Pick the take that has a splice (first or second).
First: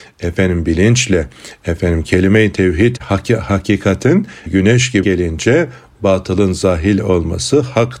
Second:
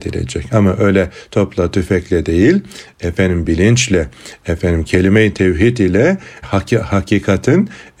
first